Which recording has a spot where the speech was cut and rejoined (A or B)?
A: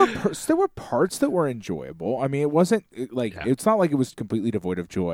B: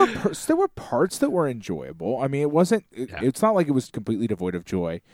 B